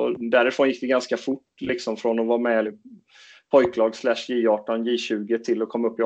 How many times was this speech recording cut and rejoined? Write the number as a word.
one